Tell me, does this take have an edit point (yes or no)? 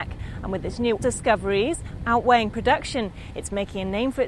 yes